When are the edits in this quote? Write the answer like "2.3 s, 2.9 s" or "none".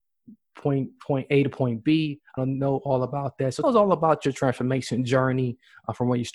2.4 s, 3.6 s